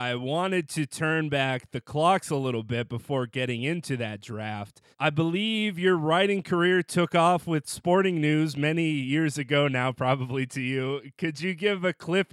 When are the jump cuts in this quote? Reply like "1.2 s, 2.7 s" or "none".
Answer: 4.9 s

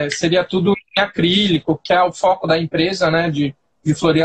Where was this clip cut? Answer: none

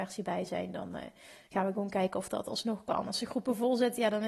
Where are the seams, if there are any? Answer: none

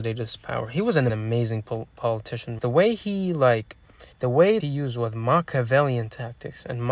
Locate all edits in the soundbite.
1.1 s, 2.6 s, 4.1 s, 4.6 s

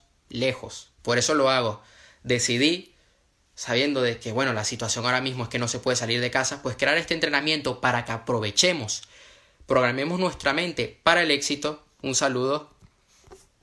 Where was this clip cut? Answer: 1.0 s

